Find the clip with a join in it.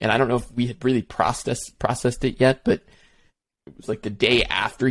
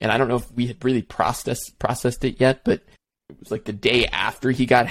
second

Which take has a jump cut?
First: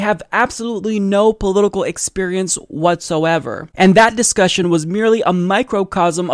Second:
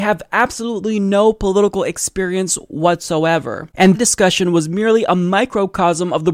second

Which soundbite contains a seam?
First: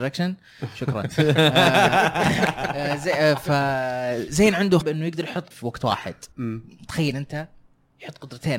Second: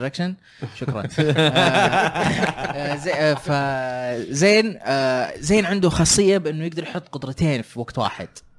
first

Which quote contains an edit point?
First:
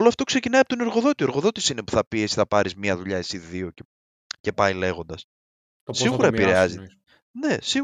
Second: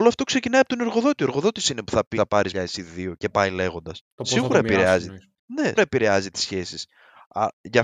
second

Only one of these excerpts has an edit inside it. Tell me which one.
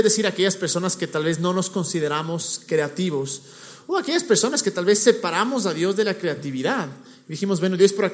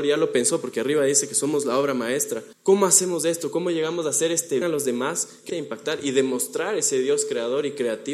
second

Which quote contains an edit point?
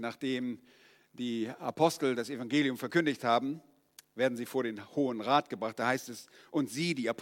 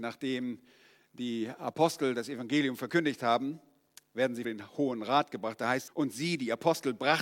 second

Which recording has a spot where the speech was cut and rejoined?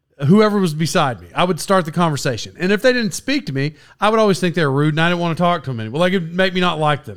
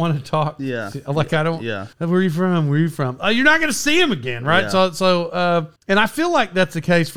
second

